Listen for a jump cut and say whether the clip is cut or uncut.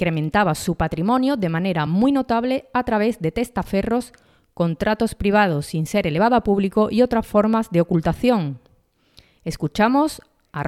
uncut